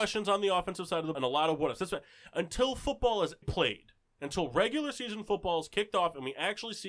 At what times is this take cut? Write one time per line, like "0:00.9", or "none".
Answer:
0:01.1
0:03.4